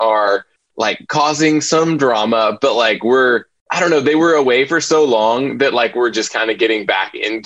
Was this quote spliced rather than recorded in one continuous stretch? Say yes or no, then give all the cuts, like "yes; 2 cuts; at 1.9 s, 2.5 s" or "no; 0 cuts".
no; 0 cuts